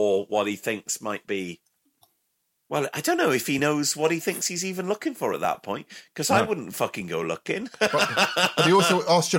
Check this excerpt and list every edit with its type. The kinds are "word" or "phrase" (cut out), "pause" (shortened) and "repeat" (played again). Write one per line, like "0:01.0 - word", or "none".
none